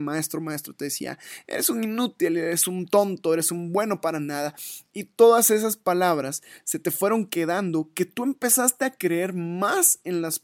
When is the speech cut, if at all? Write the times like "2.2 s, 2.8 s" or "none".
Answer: none